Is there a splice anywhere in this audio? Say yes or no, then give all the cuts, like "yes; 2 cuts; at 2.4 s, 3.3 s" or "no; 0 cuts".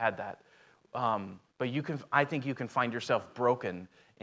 yes; 1 cut; at 1.5 s